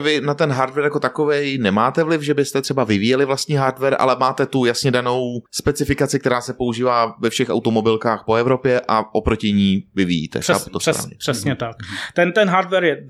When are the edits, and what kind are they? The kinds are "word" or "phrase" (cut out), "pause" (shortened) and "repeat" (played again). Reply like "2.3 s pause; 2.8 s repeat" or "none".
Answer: 5.5 s pause